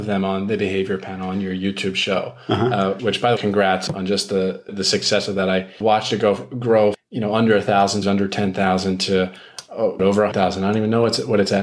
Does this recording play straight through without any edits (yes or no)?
no